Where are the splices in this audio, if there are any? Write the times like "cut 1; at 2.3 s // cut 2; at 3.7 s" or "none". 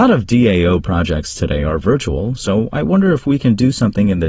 none